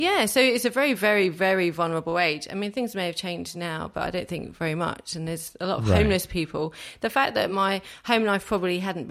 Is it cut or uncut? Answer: uncut